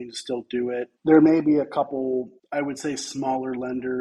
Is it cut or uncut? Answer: cut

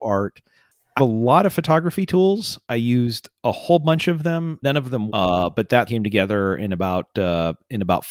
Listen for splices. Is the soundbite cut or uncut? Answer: cut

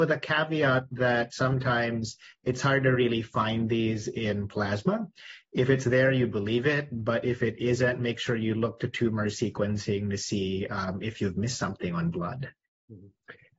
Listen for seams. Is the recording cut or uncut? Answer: uncut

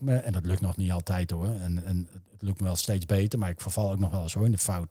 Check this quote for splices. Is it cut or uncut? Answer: uncut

